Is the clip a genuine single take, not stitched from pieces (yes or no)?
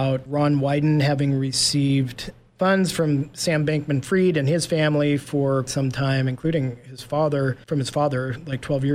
no